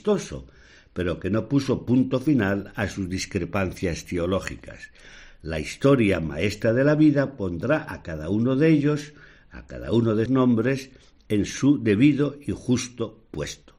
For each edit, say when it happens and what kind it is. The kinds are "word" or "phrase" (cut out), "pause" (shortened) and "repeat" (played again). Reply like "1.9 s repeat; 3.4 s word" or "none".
10.3 s word